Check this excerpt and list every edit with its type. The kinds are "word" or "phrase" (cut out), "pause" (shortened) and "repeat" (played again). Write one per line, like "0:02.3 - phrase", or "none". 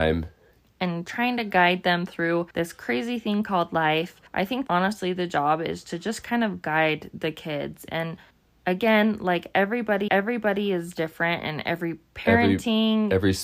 0:02.5 - pause
0:04.3 - pause
0:04.7 - word
0:08.3 - pause
0:10.1 - repeat